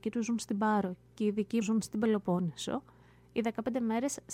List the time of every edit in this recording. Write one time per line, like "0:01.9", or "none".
0:01.6